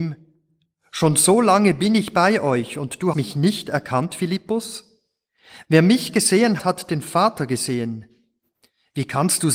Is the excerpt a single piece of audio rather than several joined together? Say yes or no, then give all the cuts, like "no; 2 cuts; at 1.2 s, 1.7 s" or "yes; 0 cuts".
no; 2 cuts; at 3.1 s, 6.6 s